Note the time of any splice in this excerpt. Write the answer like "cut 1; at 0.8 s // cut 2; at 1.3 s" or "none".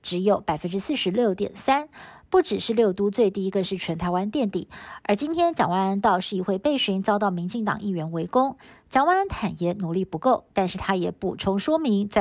none